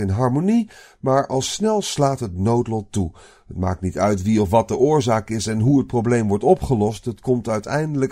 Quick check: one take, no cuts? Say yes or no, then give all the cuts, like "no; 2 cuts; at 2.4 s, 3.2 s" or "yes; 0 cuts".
yes; 0 cuts